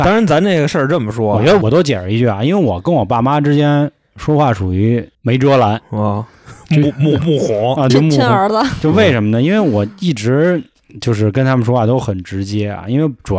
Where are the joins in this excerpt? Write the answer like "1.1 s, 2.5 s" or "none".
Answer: 7.9 s